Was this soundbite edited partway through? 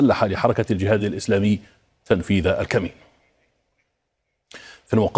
no; 0 cuts

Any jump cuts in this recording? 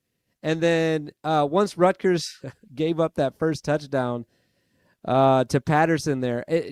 no; 0 cuts

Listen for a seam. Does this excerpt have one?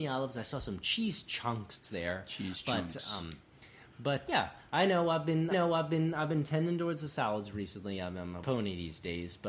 yes; 3 cuts; at 4.3 s, 5.5 s, 8.4 s

